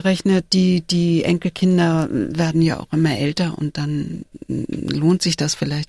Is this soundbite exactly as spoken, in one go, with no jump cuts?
yes; 0 cuts

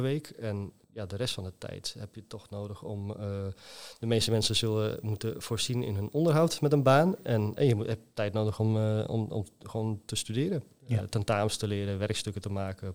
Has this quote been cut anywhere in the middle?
yes; 1 cut; at 7.6 s

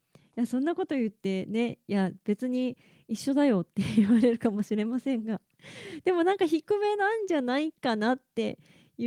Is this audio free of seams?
yes; 0 cuts

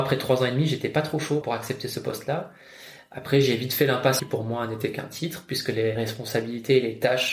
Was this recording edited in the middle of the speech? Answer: yes; 3 cuts; at 1.4 s, 4.2 s, 5.9 s

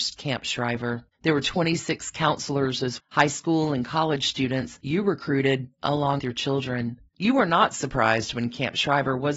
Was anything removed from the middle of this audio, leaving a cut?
yes; 4 cuts; at 1.1 s, 3.0 s, 6.2 s, 7.1 s

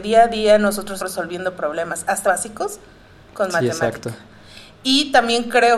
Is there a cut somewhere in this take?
yes; 2 cuts; at 1.0 s, 2.2 s

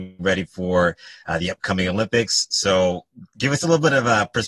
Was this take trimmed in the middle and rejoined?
yes; 1 cut; at 3.3 s

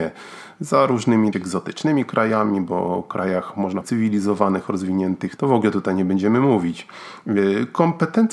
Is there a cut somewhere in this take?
yes; 3 cuts; at 1.3 s, 3.8 s, 5.4 s

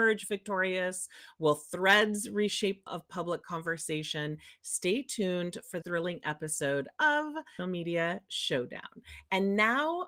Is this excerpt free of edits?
no; 3 cuts; at 2.9 s, 5.8 s, 7.6 s

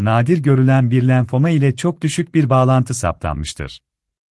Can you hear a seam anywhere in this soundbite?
no; 0 cuts

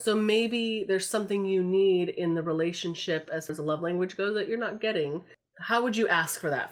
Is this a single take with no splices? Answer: no; 1 cut; at 3.5 s

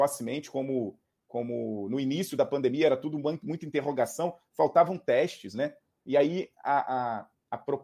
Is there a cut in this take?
no; 0 cuts

